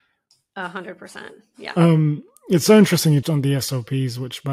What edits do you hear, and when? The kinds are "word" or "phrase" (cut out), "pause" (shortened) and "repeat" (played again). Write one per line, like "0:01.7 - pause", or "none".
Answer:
0:03.2 - word